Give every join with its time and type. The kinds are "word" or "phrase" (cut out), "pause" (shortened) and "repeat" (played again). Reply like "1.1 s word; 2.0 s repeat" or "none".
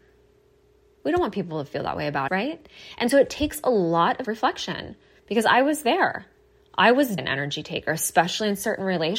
2.3 s word; 4.2 s word; 7.2 s word